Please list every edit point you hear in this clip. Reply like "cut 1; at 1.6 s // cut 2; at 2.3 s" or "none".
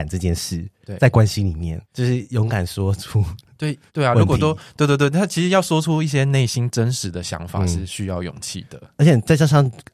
cut 1; at 1.8 s // cut 2; at 3.9 s